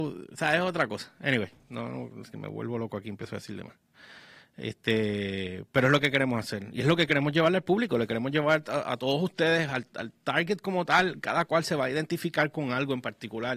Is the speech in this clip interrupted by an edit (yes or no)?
no